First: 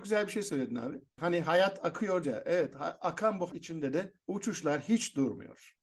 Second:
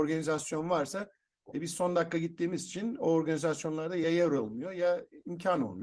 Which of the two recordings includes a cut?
first; 2 cuts; at 2.2 s, 3.5 s

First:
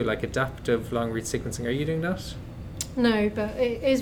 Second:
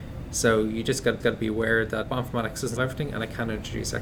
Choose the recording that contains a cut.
second; 3 cuts; at 1.2 s, 2.0 s, 2.8 s

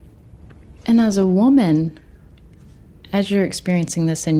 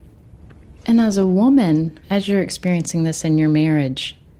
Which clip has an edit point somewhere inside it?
second; 1 cut; at 2.0 s

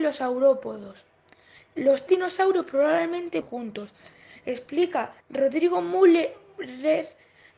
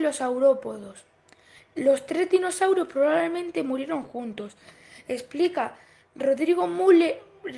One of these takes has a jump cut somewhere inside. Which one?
first; 3 cuts; at 2.1 s, 3.4 s, 5.2 s

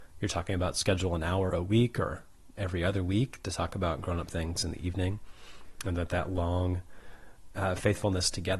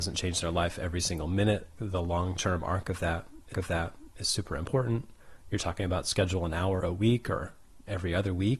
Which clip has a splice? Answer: second; 2 cuts; at 1.8 s, 3.5 s

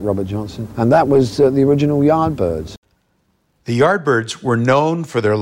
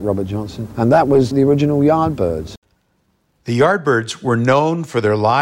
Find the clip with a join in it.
second; 1 cut; at 1.3 s

